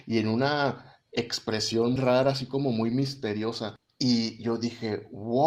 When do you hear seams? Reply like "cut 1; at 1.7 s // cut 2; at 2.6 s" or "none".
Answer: cut 1; at 2.0 s